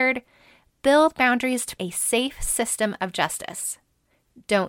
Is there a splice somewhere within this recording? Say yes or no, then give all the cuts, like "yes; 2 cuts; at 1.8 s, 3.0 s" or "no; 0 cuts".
yes; 1 cut; at 1.8 s